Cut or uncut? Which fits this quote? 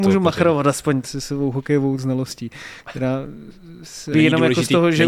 cut